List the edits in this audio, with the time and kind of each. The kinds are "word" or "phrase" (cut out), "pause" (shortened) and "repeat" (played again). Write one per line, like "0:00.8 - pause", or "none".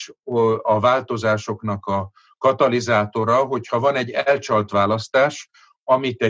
none